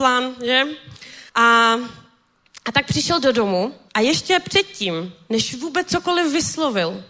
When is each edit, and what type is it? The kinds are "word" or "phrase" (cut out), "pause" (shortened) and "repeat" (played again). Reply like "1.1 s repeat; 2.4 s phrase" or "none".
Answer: 1.3 s pause; 3.9 s pause